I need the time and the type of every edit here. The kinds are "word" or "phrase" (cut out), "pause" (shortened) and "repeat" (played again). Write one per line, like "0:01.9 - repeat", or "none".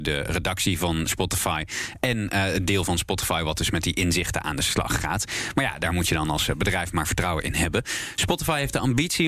none